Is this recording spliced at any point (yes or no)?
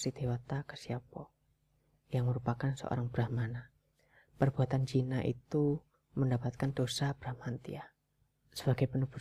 no